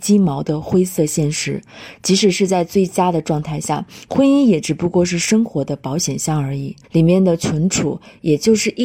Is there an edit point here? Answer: yes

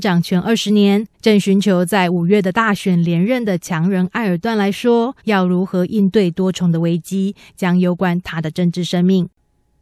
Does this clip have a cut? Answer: yes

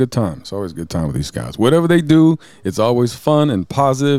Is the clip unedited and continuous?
yes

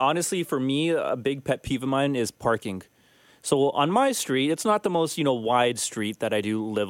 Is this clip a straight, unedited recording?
yes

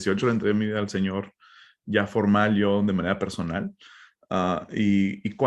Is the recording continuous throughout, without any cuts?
yes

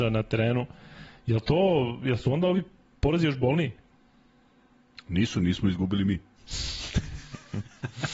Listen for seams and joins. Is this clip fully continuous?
yes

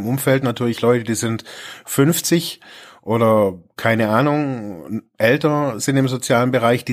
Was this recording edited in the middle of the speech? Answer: no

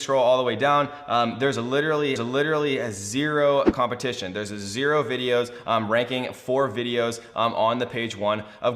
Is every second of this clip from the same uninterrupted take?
no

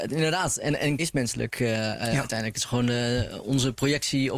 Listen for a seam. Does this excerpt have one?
yes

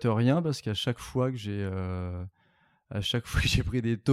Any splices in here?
no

